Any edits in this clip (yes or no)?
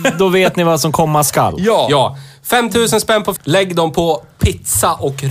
yes